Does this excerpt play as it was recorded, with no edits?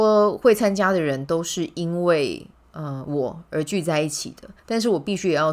no; 2 cuts; at 2.5 s, 4.6 s

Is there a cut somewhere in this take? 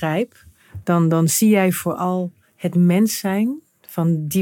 no; 0 cuts

